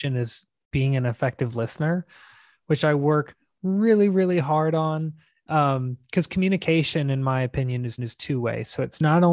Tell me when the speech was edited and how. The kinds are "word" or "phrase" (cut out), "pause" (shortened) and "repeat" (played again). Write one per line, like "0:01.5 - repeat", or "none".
0:08.0 - repeat